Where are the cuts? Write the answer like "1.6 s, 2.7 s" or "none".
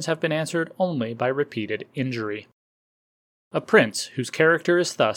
none